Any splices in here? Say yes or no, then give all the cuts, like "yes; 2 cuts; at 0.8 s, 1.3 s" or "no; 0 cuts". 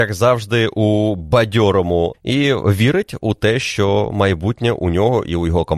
yes; 1 cut; at 2.1 s